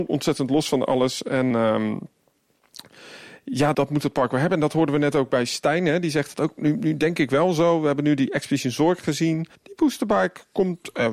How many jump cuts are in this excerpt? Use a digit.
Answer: 3